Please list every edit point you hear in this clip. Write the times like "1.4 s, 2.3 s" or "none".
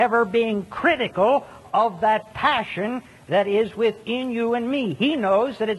none